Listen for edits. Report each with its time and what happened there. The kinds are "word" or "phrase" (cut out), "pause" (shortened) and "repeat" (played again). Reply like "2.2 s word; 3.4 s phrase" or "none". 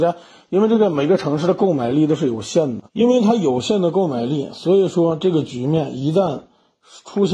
2.9 s pause